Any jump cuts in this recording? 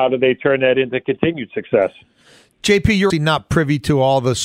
yes; 1 cut; at 3.1 s

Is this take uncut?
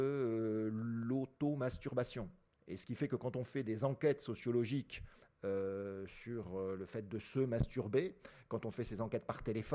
yes; 0 cuts

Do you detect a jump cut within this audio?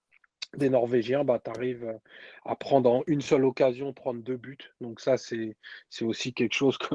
no; 0 cuts

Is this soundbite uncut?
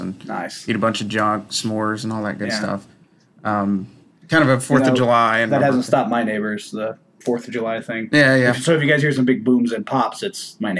yes; 0 cuts

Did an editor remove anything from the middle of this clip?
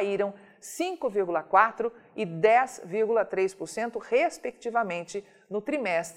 no; 0 cuts

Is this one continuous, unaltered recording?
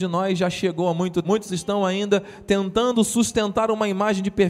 no; 1 cut; at 1.2 s

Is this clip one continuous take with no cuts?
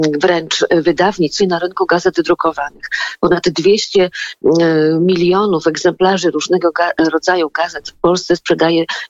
no; 1 cut; at 1.4 s

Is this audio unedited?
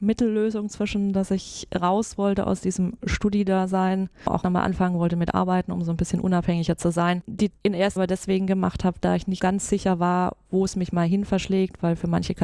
no; 4 cuts; at 4.4 s, 7.5 s, 8.0 s, 9.4 s

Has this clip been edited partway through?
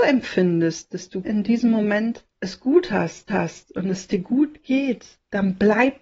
yes; 3 cuts; at 1.2 s, 2.3 s, 3.3 s

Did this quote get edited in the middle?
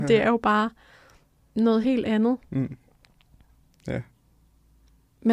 no; 0 cuts

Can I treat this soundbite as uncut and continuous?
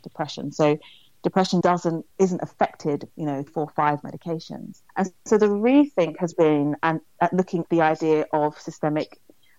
no; 8 cuts; at 1.6 s, 2.1 s, 3.1 s, 3.5 s, 4.0 s, 4.9 s, 6.3 s, 7.6 s

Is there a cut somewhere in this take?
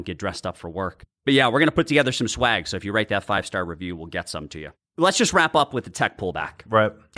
no; 0 cuts

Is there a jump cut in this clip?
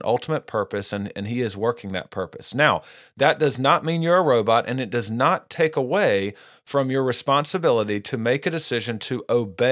no; 0 cuts

